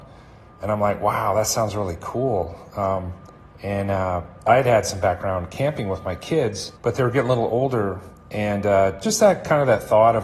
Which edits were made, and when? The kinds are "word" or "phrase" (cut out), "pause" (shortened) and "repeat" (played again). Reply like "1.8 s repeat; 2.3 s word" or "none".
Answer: 3.4 s pause; 6.8 s pause; 9.0 s phrase

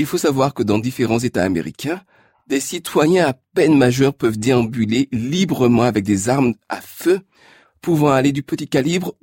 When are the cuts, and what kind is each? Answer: none

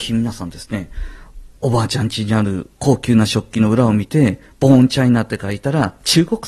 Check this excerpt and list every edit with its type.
1.6 s pause

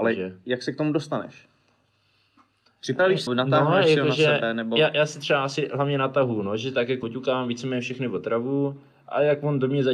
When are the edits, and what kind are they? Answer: 3.3 s word; 7.0 s word

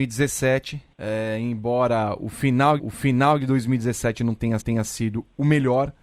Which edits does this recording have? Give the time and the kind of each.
0.9 s pause; 2.8 s repeat; 4.6 s repeat

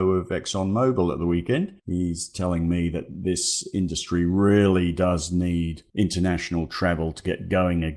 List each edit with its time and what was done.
none

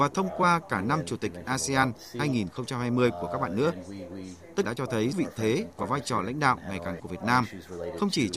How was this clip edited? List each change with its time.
4.6 s word; 5.1 s word; 7.0 s word

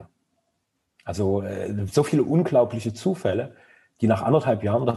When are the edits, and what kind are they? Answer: none

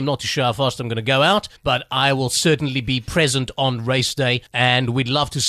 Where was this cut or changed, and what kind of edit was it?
1.6 s pause; 4.5 s pause

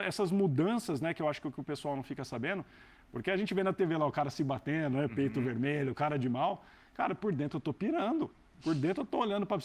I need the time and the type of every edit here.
none

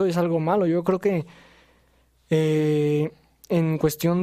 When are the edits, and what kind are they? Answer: none

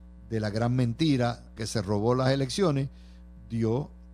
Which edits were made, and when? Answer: 1.6 s word

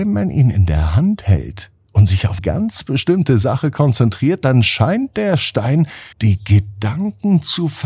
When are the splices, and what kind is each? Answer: 2.4 s word; 6.1 s pause

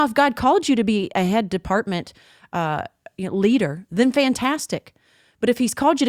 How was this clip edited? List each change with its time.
none

